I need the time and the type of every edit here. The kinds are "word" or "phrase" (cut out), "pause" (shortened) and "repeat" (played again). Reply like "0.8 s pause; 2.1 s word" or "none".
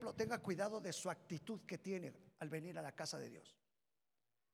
none